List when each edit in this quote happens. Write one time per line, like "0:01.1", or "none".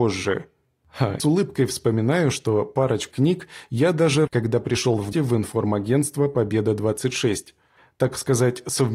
0:01.2
0:03.1
0:04.3
0:05.1